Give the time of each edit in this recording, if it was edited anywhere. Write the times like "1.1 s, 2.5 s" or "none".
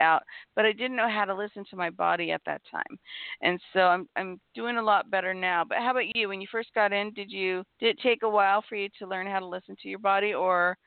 7.7 s